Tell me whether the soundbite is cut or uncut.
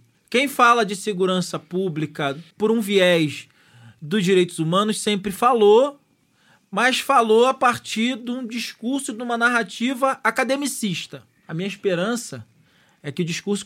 cut